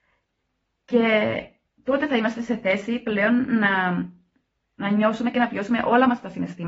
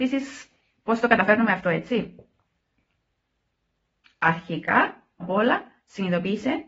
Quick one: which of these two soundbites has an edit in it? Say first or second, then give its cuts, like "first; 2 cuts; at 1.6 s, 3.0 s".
second; 1 cut; at 5.2 s